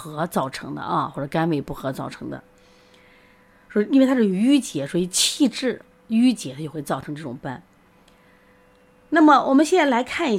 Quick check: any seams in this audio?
no; 0 cuts

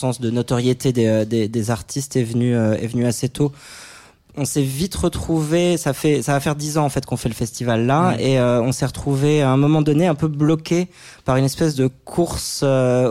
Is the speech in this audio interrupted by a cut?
no; 0 cuts

